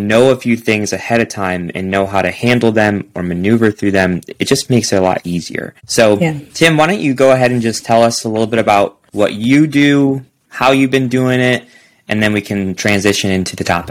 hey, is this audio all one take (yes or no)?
no